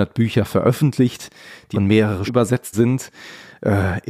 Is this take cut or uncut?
cut